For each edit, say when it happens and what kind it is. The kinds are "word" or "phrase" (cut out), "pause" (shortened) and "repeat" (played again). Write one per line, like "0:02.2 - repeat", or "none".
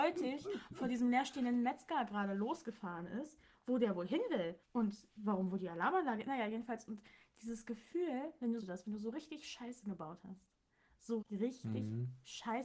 0:04.6 - pause
0:08.6 - phrase
0:11.2 - word